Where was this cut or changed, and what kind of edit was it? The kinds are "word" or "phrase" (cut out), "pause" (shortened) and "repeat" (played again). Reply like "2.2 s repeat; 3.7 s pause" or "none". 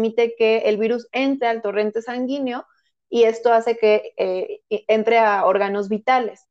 none